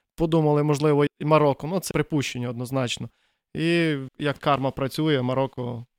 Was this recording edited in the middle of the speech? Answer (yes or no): yes